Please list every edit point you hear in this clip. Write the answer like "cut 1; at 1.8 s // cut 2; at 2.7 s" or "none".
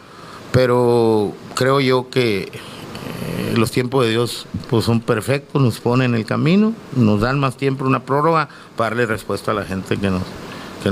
none